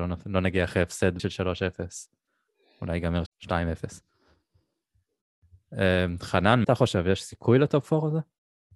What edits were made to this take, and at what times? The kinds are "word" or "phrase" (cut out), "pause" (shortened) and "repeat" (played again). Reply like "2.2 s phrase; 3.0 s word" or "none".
1.2 s word; 3.3 s word; 6.6 s word